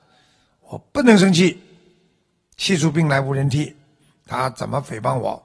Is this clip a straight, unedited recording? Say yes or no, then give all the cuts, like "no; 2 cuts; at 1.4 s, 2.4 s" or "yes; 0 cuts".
yes; 0 cuts